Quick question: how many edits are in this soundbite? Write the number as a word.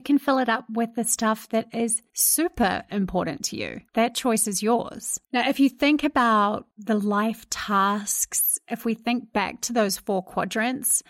three